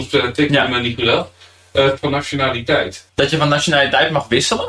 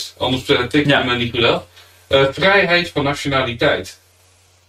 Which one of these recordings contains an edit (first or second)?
first